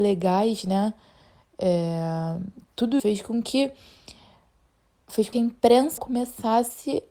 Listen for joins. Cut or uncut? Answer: cut